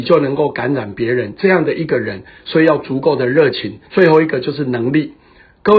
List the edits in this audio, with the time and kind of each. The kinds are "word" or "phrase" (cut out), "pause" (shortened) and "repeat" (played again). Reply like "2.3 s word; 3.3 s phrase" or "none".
3.8 s pause